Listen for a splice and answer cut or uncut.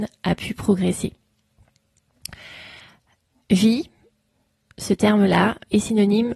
uncut